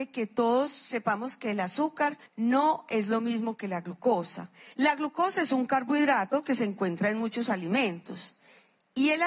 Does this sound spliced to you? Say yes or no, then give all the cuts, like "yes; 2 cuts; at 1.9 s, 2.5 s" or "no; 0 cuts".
yes; 2 cuts; at 2.3 s, 4.7 s